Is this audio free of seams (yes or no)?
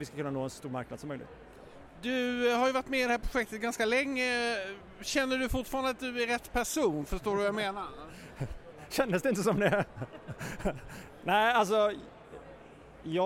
yes